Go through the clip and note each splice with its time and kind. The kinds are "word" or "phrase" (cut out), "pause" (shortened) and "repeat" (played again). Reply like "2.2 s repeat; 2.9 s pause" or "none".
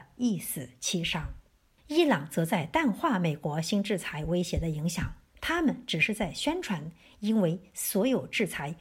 1.5 s pause; 5.3 s pause